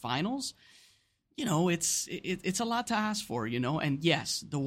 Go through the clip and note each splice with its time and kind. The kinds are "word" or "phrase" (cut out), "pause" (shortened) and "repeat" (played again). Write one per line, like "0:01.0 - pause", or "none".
none